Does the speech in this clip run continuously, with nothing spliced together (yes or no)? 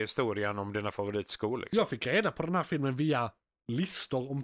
yes